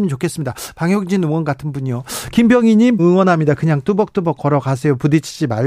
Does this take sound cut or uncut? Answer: cut